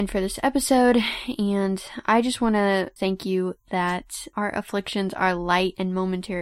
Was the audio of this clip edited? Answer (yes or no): no